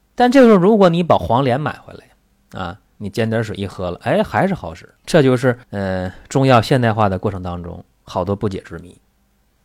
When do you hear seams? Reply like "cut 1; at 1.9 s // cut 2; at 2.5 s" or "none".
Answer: cut 1; at 5.0 s // cut 2; at 5.6 s